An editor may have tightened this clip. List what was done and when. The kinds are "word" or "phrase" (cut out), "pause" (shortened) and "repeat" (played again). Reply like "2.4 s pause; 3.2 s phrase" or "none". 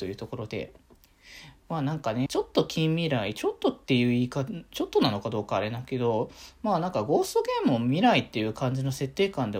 2.3 s phrase